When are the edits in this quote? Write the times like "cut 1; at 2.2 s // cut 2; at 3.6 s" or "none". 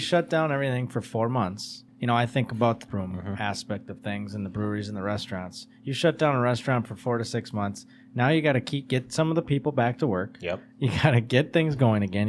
cut 1; at 1.9 s // cut 2; at 2.9 s